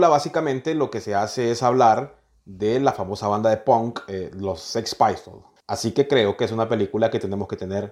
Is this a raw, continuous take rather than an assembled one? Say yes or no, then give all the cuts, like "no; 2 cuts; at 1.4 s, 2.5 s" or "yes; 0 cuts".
yes; 0 cuts